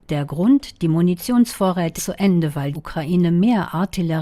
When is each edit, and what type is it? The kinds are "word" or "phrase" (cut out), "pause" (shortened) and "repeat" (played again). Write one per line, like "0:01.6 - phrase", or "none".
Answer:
0:02.0 - word
0:02.7 - word